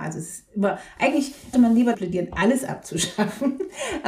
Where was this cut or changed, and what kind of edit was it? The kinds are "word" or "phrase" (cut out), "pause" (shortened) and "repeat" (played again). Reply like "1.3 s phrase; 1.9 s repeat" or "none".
1.5 s word; 1.9 s word